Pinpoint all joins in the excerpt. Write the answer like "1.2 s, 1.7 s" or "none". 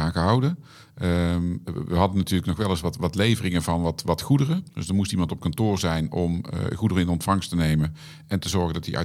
4.7 s